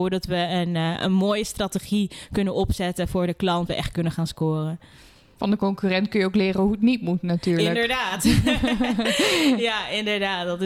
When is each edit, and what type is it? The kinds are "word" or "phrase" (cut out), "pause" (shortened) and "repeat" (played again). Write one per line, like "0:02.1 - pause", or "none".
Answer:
0:03.7 - word